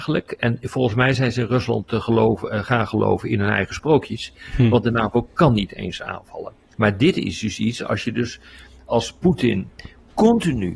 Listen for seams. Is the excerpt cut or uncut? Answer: uncut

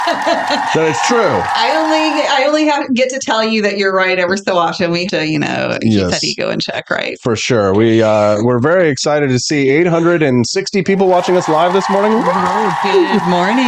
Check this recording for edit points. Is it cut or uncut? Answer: cut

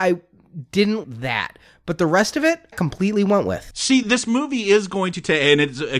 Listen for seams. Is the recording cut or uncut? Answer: cut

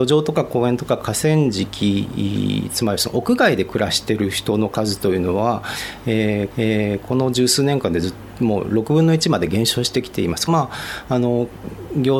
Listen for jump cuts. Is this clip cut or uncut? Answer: cut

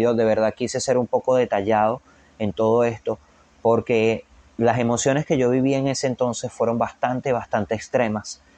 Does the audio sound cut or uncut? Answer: uncut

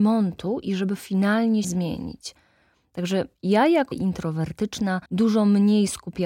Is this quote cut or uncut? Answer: cut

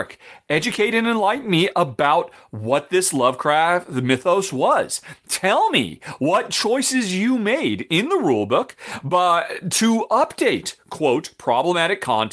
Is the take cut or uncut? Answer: uncut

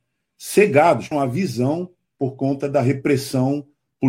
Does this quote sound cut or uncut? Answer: cut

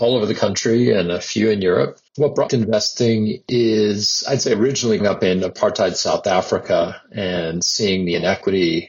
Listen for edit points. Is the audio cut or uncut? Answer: cut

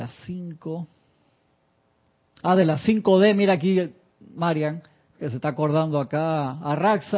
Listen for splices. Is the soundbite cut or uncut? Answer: uncut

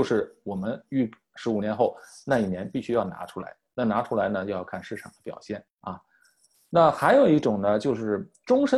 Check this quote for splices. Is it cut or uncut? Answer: cut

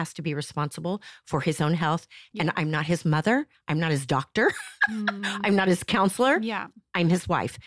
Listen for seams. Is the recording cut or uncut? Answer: uncut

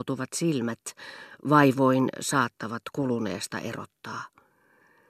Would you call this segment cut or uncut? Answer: cut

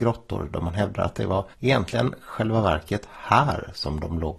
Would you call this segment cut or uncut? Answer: cut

